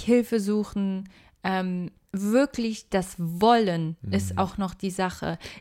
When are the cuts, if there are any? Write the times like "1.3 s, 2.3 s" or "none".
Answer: none